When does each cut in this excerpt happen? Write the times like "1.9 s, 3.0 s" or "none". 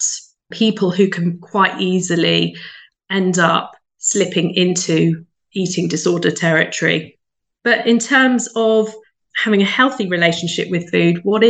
none